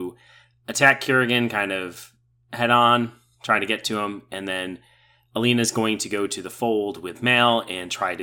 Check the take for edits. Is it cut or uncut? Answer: uncut